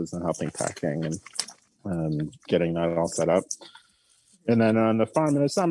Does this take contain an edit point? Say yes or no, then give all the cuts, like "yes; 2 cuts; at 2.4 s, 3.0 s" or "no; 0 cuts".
no; 0 cuts